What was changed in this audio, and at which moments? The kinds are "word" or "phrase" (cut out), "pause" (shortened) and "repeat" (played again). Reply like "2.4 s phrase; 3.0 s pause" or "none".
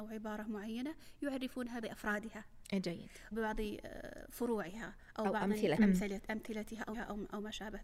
1.8 s word; 3.3 s word; 5.8 s word; 6.9 s word